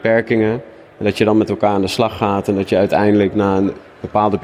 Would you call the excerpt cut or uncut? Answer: uncut